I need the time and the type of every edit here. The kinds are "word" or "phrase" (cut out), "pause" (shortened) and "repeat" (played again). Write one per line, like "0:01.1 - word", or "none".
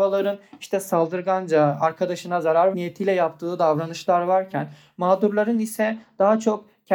0:02.7 - word